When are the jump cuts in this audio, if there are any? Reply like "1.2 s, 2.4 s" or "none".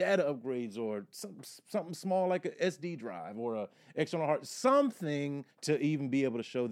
5.5 s